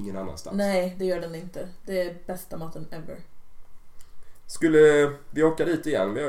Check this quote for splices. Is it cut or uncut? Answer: uncut